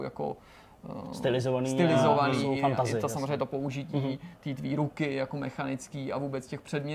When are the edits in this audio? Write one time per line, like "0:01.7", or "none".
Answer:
none